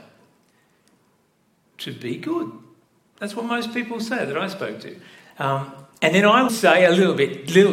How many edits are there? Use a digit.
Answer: 1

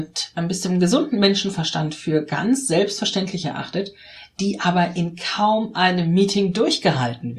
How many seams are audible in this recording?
0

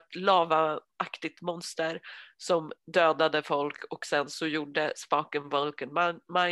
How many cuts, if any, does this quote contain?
1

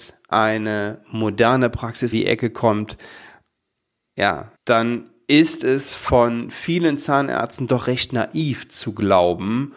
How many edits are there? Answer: 2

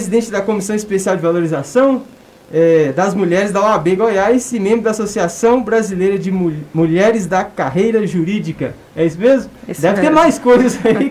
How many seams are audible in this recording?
0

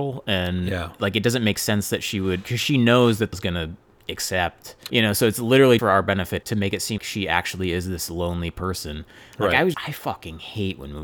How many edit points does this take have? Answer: 7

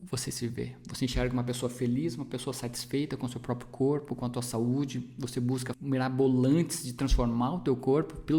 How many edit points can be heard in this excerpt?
1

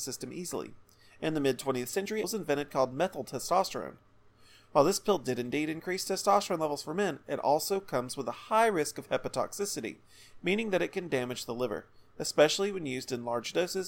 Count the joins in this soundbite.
1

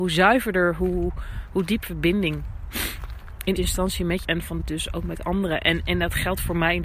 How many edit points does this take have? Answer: 4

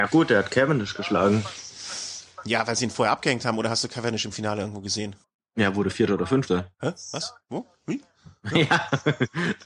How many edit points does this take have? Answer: 2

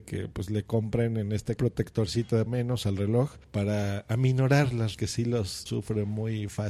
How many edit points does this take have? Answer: 5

